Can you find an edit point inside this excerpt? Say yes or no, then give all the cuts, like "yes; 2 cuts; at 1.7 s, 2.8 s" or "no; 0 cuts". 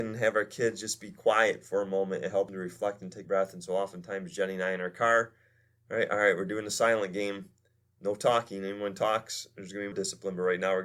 yes; 3 cuts; at 2.5 s, 3.2 s, 9.9 s